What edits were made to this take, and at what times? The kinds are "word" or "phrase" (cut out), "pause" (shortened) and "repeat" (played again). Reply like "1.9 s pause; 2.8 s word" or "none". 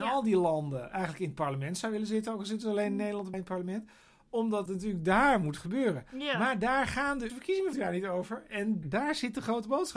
3.3 s word; 4.7 s word; 7.3 s word; 7.7 s word; 8.8 s word